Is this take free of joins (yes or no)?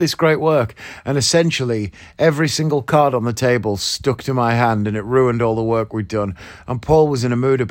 yes